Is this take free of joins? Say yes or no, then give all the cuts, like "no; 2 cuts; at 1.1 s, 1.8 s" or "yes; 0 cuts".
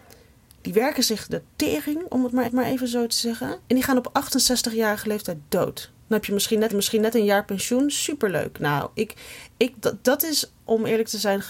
no; 5 cuts; at 1.5 s, 2.4 s, 3.6 s, 5.9 s, 6.7 s